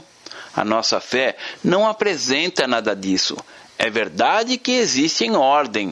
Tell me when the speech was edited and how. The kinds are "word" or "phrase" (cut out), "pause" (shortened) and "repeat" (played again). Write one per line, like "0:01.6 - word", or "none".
none